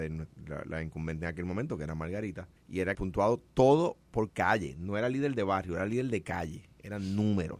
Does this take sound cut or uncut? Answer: cut